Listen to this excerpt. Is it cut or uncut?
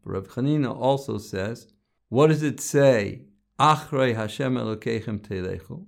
uncut